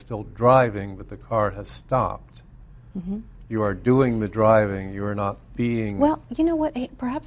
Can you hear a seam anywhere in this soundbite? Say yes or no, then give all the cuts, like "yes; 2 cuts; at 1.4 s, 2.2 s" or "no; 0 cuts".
no; 0 cuts